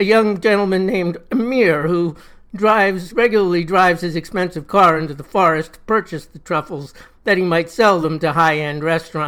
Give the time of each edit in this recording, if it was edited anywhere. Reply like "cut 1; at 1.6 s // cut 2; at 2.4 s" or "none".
none